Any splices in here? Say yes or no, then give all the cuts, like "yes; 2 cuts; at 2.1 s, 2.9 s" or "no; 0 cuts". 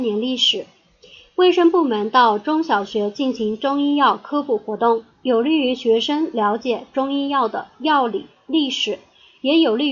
no; 0 cuts